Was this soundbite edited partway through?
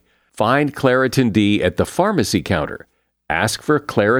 no; 0 cuts

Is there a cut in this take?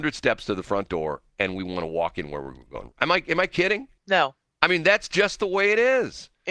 yes; 1 cut; at 4.0 s

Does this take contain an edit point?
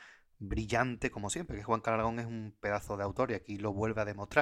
no; 0 cuts

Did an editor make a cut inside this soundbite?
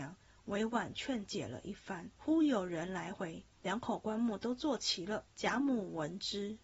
yes; 3 cuts; at 2.1 s, 3.6 s, 5.3 s

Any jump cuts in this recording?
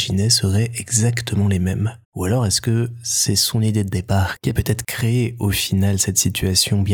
yes; 1 cut; at 2.0 s

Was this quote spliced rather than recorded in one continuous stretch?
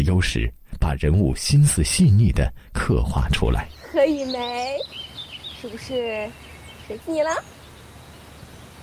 yes; 1 cut; at 7.0 s

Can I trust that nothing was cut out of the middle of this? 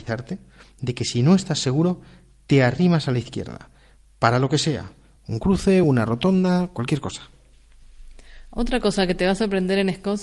yes; 0 cuts

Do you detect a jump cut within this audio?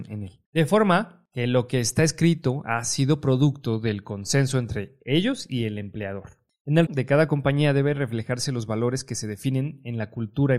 yes; 1 cut; at 6.9 s

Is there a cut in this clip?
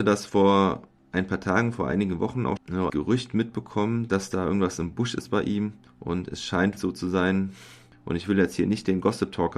yes; 3 cuts; at 2.6 s, 2.9 s, 6.8 s

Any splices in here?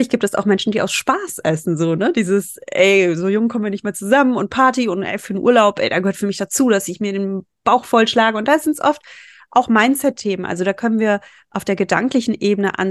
no; 0 cuts

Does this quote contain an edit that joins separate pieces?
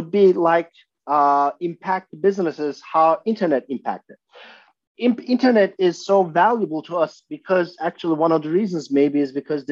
no; 0 cuts

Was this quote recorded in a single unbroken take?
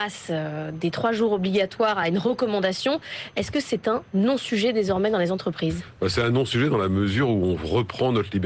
yes; 0 cuts

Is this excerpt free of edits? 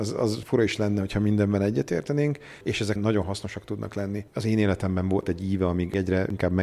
no; 1 cut; at 3.0 s

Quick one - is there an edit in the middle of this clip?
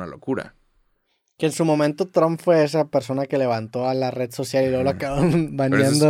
no; 0 cuts

